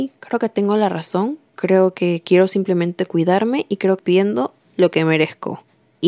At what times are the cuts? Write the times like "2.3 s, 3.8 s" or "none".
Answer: 1.5 s, 4.0 s